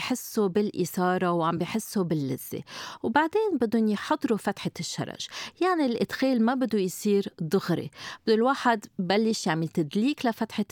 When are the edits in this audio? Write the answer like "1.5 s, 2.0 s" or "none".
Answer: none